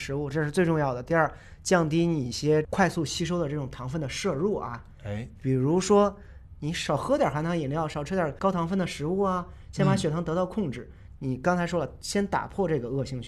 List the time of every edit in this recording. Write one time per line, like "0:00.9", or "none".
none